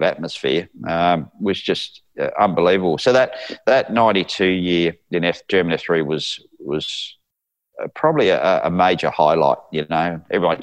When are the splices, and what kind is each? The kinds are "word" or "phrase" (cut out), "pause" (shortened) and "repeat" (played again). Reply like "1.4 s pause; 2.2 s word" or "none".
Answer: none